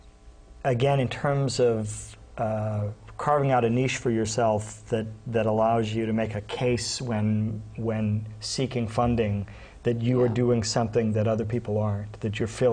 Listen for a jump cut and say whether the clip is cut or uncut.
uncut